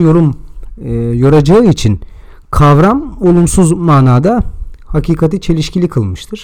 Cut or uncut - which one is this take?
uncut